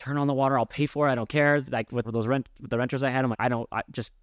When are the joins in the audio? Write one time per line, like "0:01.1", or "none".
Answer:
0:02.0
0:03.3